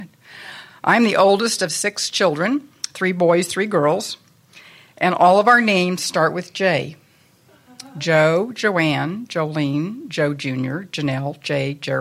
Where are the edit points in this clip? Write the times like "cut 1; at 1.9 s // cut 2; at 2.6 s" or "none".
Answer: none